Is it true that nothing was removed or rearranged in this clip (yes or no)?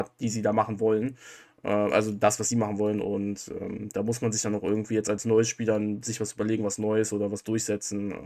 yes